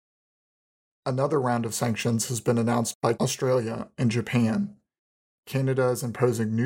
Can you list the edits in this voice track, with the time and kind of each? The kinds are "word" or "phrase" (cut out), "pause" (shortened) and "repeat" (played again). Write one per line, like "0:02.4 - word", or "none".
0:03.1 - word